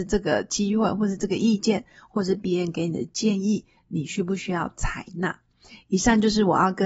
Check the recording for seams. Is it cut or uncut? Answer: uncut